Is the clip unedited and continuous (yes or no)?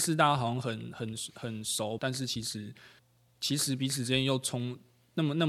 no